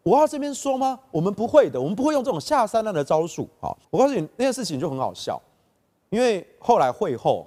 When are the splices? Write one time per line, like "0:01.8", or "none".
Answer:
0:03.8